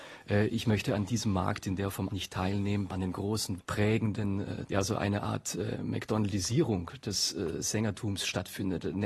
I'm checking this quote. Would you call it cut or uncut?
cut